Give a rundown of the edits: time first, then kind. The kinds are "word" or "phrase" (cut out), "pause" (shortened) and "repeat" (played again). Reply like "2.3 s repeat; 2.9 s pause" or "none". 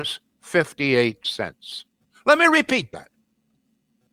none